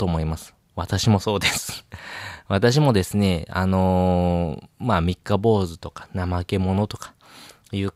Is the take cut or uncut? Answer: cut